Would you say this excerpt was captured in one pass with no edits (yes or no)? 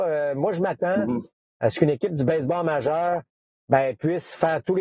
yes